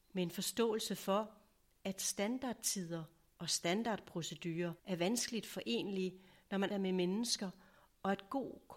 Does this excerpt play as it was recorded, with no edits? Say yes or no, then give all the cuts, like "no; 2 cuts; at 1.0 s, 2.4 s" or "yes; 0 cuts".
no; 2 cuts; at 4.8 s, 6.7 s